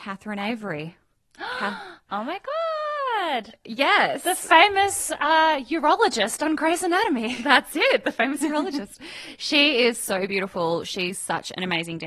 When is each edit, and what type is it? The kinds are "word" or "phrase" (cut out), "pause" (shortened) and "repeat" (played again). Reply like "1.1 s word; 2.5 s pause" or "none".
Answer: 1.0 s pause